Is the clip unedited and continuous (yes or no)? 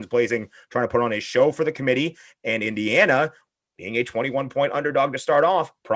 yes